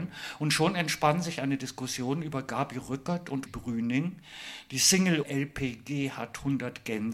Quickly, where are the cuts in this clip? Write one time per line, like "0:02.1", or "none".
0:03.5
0:05.2